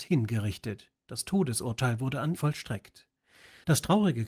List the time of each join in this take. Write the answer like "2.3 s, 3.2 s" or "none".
2.3 s